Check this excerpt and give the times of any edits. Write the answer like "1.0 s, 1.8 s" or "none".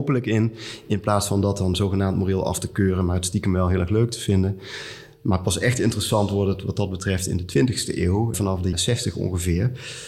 8.3 s, 8.7 s